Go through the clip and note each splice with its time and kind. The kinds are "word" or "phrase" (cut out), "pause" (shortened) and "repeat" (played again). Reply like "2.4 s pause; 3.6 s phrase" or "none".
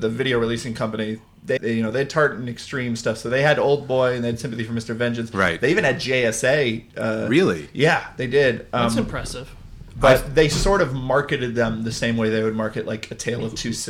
1.6 s word